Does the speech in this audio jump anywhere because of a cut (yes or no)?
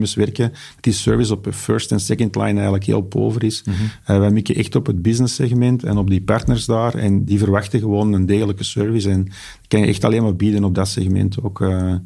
no